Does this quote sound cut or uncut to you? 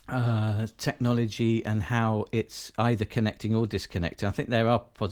uncut